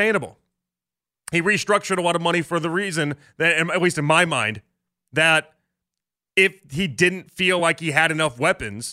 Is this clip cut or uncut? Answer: uncut